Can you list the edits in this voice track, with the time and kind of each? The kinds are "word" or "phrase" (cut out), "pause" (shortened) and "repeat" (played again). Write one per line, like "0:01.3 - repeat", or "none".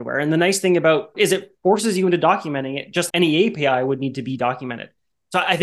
0:01.1 - phrase
0:03.1 - word

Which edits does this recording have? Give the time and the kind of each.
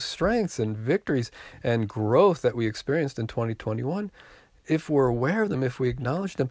none

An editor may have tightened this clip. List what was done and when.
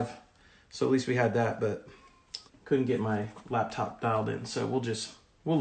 0:02.5 - pause

